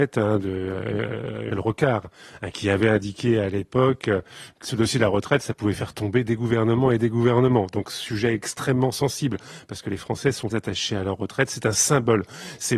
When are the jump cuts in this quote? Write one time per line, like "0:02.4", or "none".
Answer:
0:01.5
0:04.6
0:10.5